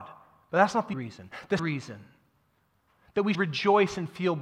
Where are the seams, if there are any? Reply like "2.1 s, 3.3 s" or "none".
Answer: 0.9 s, 1.6 s, 3.3 s

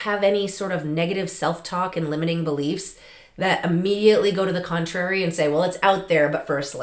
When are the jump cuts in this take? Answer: none

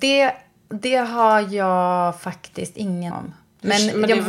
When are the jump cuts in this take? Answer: 3.1 s

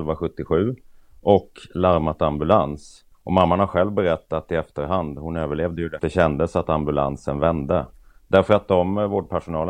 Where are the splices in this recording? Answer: 3.1 s, 6.0 s

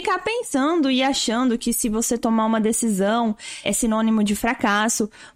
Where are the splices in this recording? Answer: 3.6 s

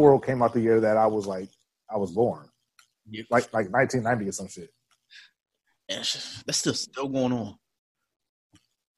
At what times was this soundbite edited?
none

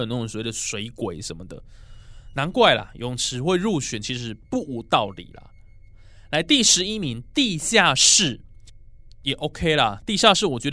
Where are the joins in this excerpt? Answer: 4.4 s

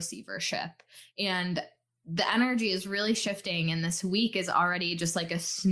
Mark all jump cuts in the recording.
none

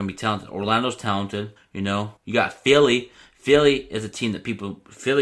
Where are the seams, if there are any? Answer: 1.6 s, 2.2 s

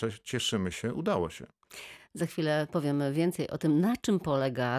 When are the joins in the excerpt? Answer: none

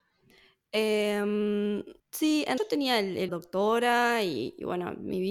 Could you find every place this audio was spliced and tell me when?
2.0 s, 2.6 s, 3.3 s

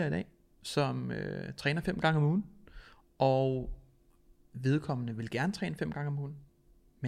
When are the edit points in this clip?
none

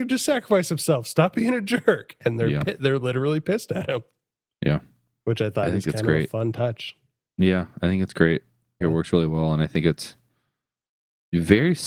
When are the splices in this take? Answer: 8.8 s

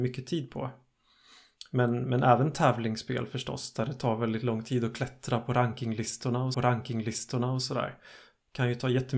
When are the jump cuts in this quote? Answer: 6.5 s

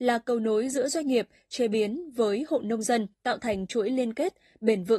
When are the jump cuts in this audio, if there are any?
3.1 s

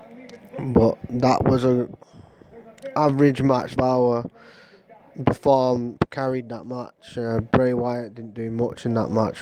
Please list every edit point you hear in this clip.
3.8 s

